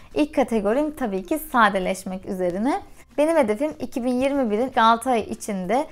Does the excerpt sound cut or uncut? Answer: cut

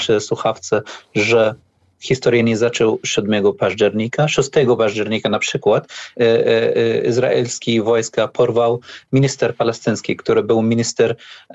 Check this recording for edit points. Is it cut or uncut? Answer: uncut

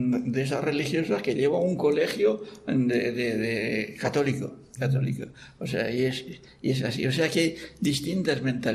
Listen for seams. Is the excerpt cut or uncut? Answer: uncut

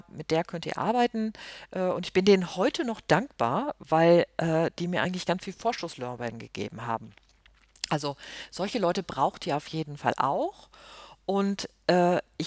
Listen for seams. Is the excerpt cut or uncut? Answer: uncut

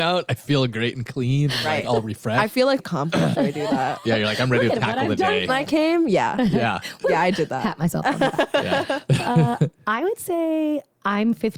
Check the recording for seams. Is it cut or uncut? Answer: cut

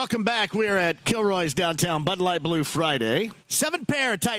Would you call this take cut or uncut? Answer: cut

